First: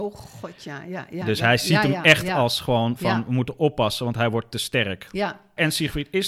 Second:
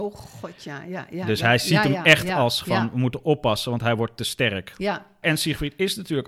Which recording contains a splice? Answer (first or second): second